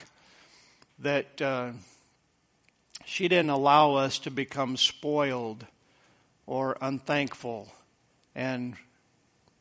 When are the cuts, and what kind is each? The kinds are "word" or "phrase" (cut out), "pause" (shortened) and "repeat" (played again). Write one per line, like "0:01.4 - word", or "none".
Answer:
none